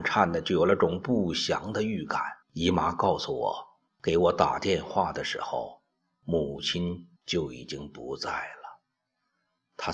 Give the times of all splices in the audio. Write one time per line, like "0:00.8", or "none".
0:02.4
0:03.9
0:07.2